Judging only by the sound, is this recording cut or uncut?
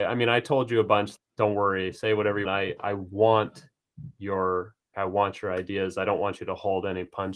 cut